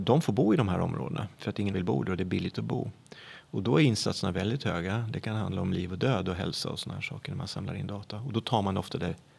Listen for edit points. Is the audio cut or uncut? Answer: cut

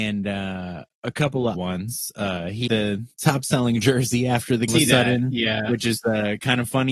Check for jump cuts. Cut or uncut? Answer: cut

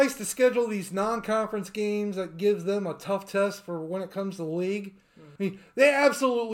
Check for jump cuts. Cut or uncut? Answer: cut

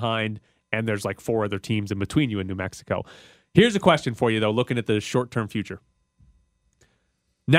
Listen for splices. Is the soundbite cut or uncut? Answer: uncut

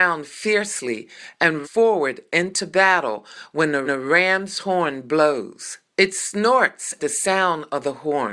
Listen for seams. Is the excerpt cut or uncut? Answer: cut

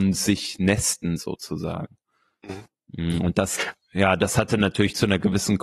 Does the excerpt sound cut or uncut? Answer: uncut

